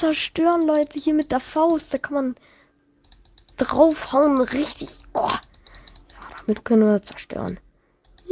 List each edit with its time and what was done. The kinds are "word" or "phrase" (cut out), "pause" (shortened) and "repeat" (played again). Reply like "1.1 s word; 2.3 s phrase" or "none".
none